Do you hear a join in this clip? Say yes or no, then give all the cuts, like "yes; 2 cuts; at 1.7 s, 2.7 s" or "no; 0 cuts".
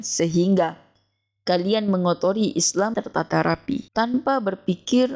yes; 2 cuts; at 2.9 s, 3.9 s